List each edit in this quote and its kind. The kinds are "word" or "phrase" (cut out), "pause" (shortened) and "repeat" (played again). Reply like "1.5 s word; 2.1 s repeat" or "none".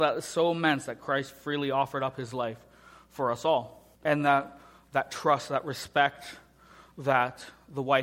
3.9 s pause